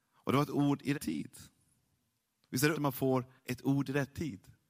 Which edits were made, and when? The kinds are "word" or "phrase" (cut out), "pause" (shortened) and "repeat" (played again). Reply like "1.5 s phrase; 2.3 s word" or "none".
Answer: 0.9 s word; 2.7 s word; 3.4 s pause